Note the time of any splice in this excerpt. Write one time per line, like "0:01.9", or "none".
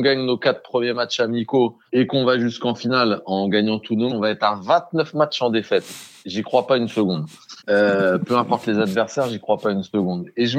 0:01.9
0:04.1
0:07.6